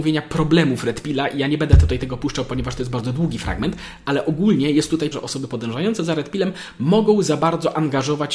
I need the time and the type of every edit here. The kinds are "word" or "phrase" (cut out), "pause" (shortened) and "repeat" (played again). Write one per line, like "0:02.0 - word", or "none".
0:05.1 - word